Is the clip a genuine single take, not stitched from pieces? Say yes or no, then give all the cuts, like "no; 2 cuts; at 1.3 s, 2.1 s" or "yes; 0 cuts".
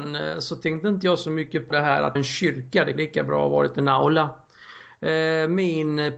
no; 3 cuts; at 1.7 s, 2.2 s, 3.0 s